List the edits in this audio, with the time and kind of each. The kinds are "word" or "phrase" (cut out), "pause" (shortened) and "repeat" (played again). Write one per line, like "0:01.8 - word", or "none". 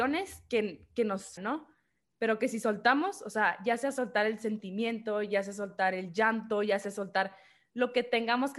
0:01.4 - word